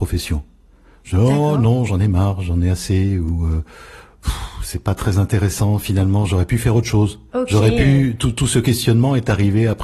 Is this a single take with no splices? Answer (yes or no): no